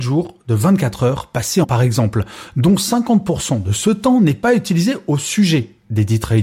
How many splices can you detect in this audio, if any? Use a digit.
1